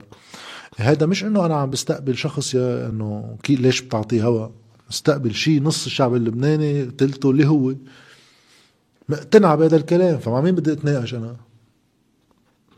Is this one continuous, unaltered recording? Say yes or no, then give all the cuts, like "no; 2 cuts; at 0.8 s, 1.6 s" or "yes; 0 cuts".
yes; 0 cuts